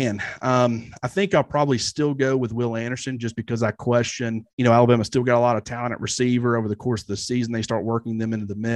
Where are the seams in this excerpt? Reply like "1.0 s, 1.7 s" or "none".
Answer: 4.5 s